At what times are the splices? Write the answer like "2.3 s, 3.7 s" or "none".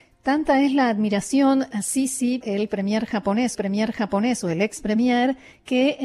1.7 s, 2.4 s, 3.5 s